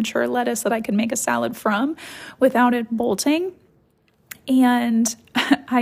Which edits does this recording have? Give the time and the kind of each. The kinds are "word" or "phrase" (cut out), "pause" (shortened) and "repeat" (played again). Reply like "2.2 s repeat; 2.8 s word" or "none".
none